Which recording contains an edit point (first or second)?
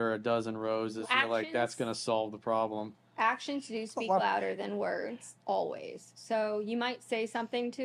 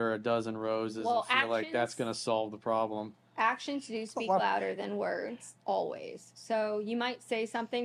first